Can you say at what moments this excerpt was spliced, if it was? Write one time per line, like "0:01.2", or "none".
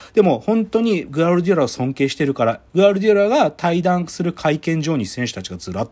0:02.7